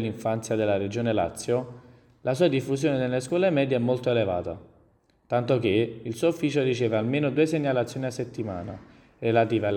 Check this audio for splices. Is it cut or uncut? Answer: uncut